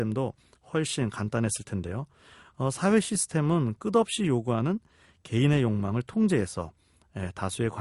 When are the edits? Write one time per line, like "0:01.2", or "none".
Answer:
none